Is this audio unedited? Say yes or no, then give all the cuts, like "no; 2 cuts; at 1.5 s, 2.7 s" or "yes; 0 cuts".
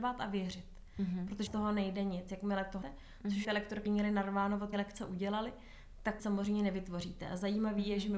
no; 6 cuts; at 1.5 s, 2.8 s, 3.4 s, 3.9 s, 4.7 s, 6.2 s